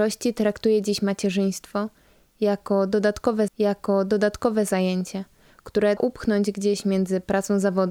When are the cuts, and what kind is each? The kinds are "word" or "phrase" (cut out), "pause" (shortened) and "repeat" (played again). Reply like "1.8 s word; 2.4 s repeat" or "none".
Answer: 3.5 s repeat; 6.0 s word